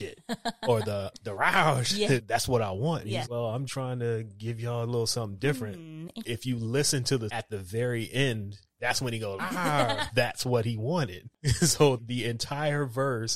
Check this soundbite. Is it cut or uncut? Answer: cut